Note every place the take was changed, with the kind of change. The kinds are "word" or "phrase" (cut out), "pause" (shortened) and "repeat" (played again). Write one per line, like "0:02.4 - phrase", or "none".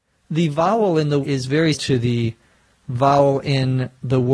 0:01.2 - phrase
0:01.7 - word